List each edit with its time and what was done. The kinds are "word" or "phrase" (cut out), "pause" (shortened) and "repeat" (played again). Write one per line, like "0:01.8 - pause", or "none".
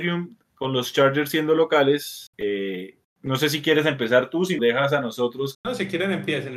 0:02.3 - pause
0:04.6 - phrase
0:05.5 - word